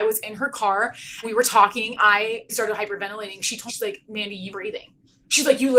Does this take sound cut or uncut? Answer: cut